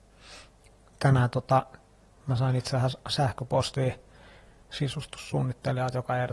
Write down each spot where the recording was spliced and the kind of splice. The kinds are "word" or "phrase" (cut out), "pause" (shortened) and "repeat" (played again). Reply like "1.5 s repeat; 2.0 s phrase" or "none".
none